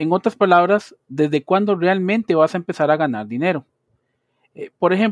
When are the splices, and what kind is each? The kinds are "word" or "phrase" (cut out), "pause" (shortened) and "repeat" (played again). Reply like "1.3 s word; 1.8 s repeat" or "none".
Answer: none

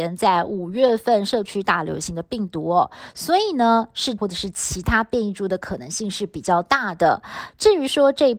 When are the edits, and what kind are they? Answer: 4.2 s word

